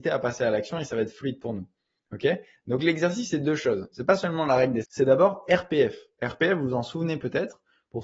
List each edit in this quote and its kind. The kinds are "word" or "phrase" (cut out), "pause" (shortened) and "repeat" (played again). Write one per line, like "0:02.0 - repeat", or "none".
0:04.8 - phrase